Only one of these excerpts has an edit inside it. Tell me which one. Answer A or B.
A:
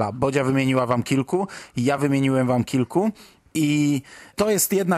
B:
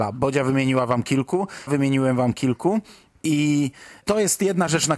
B